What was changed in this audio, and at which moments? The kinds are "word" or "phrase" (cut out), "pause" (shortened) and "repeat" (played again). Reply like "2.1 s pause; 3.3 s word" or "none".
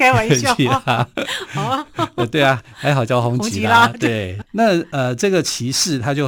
4.4 s word